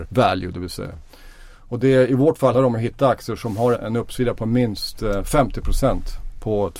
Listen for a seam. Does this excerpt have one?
yes; 2 cuts; at 2.5 s, 3.7 s

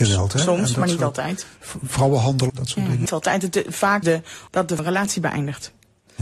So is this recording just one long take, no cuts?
no; 5 cuts; at 2.5 s, 3.1 s, 4.0 s, 4.5 s, 4.8 s

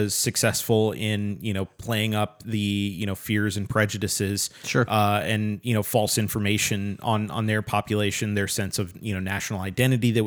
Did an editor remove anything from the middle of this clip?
no; 0 cuts

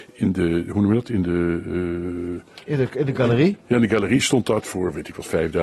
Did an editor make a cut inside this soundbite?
no; 0 cuts

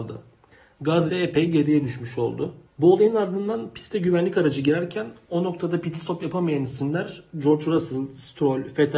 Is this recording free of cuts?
no; 2 cuts; at 1.1 s, 2.7 s

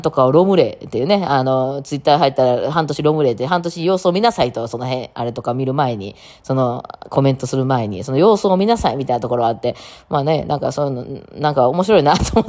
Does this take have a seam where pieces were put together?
no; 0 cuts

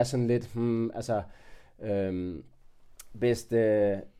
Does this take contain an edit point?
no; 0 cuts

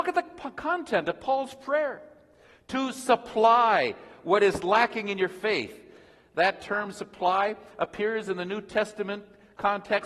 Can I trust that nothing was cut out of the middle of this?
yes; 0 cuts

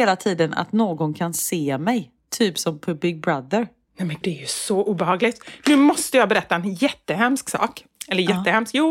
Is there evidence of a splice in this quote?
yes; 1 cut; at 4.2 s

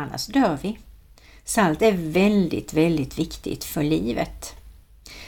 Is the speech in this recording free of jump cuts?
yes; 0 cuts

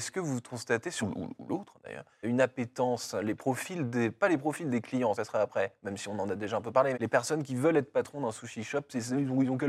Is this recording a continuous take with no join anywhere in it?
no; 4 cuts; at 1.0 s, 2.2 s, 5.1 s, 6.9 s

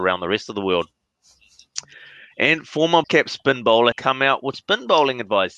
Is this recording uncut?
no; 3 cuts; at 3.0 s, 3.9 s, 4.5 s

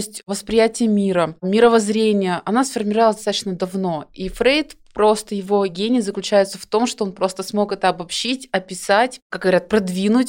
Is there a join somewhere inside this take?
no; 0 cuts

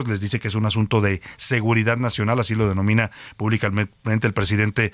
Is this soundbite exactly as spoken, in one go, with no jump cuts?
yes; 0 cuts

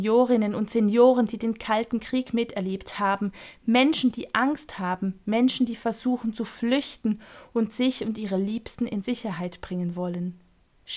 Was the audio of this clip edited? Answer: no; 0 cuts

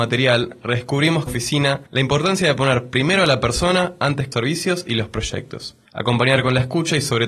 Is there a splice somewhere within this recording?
yes; 4 cuts; at 1.3 s, 1.9 s, 4.3 s, 5.8 s

